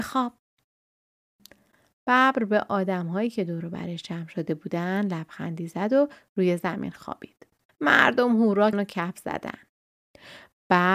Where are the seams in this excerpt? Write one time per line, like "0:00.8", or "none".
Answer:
0:07.7
0:08.7